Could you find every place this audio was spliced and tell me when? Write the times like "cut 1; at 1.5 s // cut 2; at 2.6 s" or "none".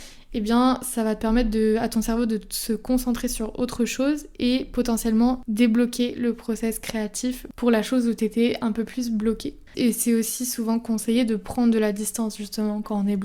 cut 1; at 9.7 s